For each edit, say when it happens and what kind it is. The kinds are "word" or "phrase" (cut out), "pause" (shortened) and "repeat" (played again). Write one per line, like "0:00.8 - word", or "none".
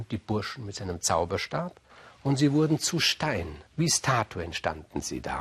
0:01.9 - pause
0:03.7 - pause